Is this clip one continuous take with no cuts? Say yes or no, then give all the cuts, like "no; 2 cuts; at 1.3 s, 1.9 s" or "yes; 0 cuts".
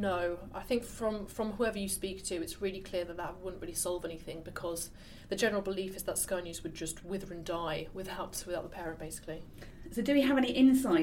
yes; 0 cuts